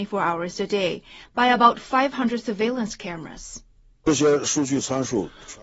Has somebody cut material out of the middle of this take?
no; 0 cuts

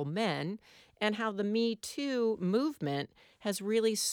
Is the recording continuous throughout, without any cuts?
yes; 0 cuts

